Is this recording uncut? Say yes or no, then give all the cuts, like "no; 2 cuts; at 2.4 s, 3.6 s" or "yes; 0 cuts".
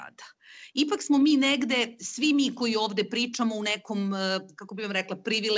yes; 0 cuts